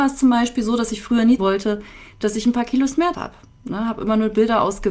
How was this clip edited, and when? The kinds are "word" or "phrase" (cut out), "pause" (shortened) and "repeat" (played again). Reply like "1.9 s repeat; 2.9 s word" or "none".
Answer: 1.4 s word; 3.1 s word